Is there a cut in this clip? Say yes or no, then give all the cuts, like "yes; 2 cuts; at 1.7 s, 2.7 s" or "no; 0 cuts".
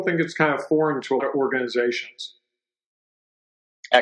yes; 1 cut; at 1.2 s